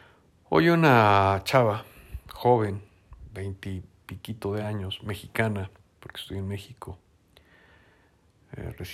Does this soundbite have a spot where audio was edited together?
no; 0 cuts

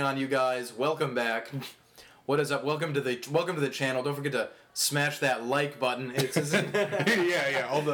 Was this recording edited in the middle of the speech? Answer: no; 0 cuts

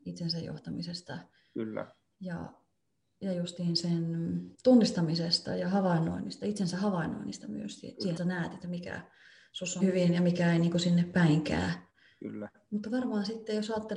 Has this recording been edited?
yes; 3 cuts; at 4.5 s, 8.2 s, 9.8 s

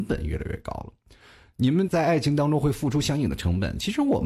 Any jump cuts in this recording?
no; 0 cuts

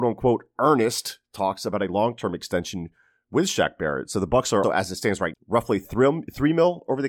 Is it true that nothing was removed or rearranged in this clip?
no; 2 cuts; at 4.6 s, 5.3 s

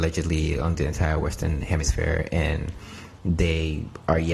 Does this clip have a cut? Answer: no; 0 cuts

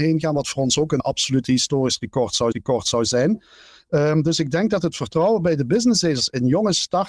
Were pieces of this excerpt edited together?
yes; 2 cuts; at 1.0 s, 2.5 s

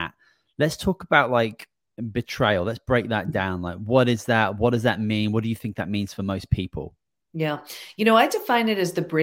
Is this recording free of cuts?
no; 1 cut; at 7.0 s

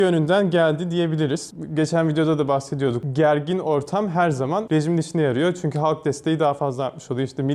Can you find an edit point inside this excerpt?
no; 0 cuts

